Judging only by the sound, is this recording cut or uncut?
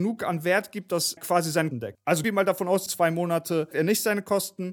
cut